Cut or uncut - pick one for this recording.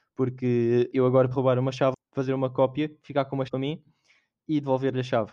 cut